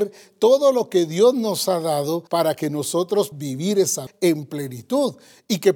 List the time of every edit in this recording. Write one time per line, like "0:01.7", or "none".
0:02.3
0:03.3
0:04.1